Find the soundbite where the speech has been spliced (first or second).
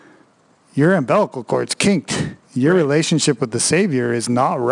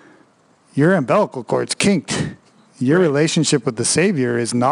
first